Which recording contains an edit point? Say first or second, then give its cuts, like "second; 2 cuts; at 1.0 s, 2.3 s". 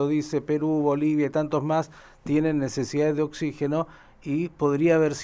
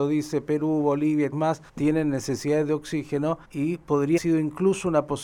second; 4 cuts; at 1.3 s, 1.7 s, 3.4 s, 4.2 s